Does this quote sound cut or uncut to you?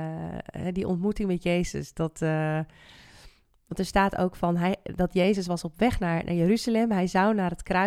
uncut